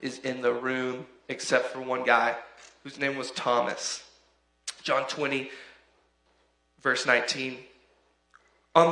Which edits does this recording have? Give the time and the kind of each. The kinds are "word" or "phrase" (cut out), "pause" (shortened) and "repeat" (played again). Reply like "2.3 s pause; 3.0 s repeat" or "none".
none